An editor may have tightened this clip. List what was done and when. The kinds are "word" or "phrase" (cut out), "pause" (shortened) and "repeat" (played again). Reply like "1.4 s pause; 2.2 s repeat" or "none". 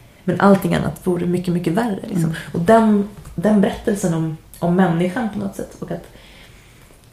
4.5 s pause